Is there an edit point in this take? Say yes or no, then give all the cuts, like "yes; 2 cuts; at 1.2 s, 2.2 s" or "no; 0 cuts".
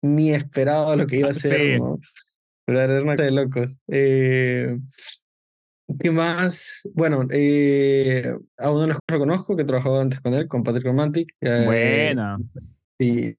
yes; 3 cuts; at 3.2 s, 8.5 s, 9.0 s